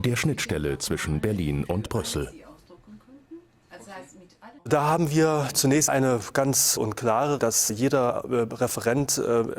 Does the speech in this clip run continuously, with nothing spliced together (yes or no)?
no